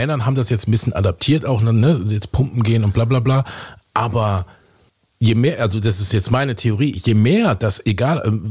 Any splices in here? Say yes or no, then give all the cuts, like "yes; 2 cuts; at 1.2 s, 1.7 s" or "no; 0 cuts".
yes; 1 cut; at 3.8 s